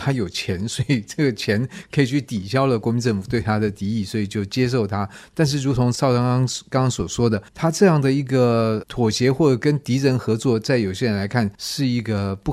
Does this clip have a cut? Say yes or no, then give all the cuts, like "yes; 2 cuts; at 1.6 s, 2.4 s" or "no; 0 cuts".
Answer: yes; 2 cuts; at 7.5 s, 11.5 s